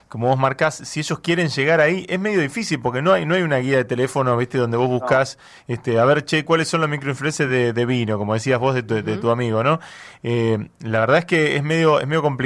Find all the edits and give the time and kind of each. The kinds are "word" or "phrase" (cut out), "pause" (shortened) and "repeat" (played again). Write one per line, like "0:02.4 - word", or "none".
none